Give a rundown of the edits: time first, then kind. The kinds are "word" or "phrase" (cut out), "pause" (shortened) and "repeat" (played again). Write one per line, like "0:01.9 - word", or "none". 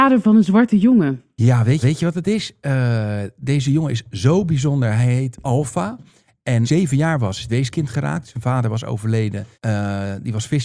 0:01.8 - repeat
0:06.6 - phrase
0:07.5 - word
0:09.5 - pause